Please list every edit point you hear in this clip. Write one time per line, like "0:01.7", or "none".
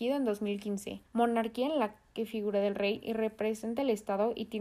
0:01.1